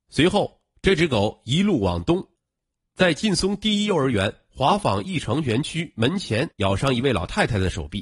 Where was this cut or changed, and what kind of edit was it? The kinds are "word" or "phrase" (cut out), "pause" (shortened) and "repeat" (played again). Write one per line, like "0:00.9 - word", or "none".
0:06.5 - pause